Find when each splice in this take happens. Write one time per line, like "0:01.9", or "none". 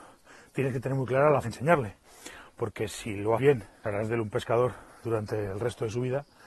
0:01.4
0:03.4
0:03.8
0:05.0